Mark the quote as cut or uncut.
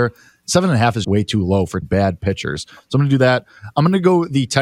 cut